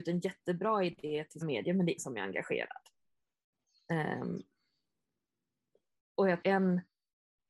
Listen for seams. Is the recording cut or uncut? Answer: cut